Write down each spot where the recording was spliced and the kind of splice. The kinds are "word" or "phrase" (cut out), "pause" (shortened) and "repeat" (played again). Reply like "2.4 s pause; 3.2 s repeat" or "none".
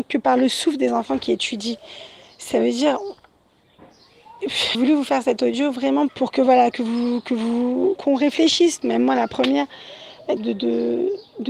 4.7 s word; 6.1 s word; 6.7 s word; 8.0 s word; 8.8 s word; 10.4 s word